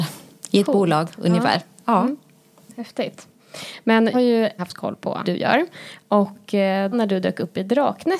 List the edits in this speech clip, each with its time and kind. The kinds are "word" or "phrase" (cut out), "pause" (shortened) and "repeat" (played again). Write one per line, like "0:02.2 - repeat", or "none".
0:04.1 - word
0:04.6 - word
0:05.2 - word
0:06.9 - word